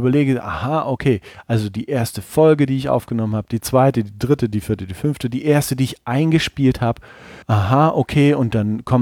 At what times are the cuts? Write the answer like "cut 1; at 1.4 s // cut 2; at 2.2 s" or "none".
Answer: cut 1; at 7.4 s